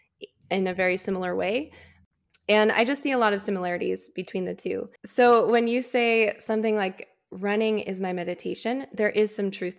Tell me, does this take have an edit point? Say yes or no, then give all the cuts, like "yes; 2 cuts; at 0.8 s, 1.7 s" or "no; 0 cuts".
yes; 1 cut; at 5.0 s